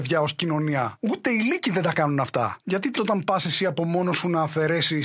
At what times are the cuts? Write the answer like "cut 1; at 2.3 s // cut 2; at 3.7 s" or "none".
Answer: cut 1; at 2.9 s